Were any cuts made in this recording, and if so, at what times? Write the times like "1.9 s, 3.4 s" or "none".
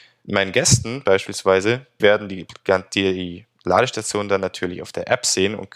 2.0 s